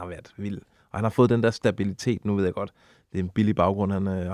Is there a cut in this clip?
no; 0 cuts

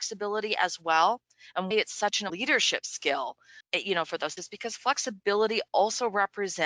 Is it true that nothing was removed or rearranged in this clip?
no; 4 cuts; at 1.7 s, 2.3 s, 3.6 s, 4.4 s

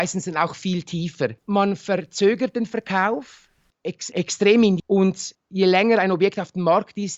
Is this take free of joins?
no; 3 cuts; at 1.4 s, 4.1 s, 4.8 s

